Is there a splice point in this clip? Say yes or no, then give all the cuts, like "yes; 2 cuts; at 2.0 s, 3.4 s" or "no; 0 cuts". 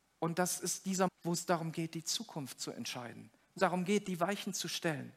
yes; 2 cuts; at 1.1 s, 3.6 s